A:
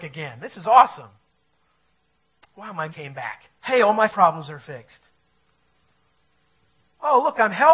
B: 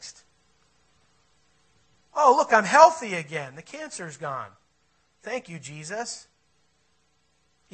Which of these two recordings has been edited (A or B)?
A